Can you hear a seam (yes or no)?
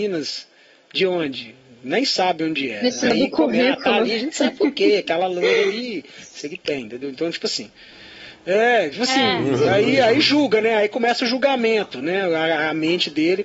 no